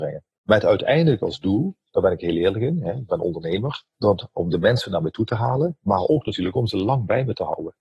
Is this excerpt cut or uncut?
cut